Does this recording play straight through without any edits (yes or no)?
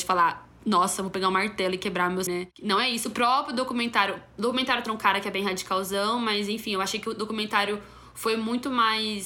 no